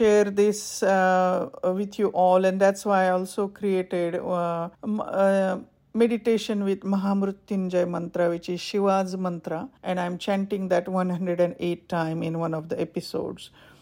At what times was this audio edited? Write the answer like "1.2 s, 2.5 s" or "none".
4.7 s, 9.8 s